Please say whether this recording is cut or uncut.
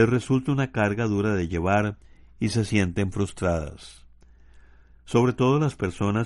uncut